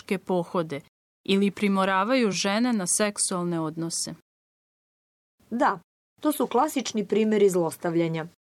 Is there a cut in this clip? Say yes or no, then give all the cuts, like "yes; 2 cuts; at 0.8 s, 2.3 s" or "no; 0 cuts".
no; 0 cuts